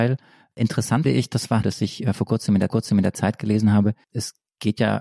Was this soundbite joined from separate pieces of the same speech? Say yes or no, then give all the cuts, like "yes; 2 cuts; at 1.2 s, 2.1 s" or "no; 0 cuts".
yes; 4 cuts; at 1.0 s, 1.6 s, 2.7 s, 4.0 s